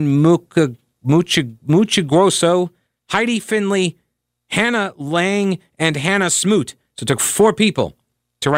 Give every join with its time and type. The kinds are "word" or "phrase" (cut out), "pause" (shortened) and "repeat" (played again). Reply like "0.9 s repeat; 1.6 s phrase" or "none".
none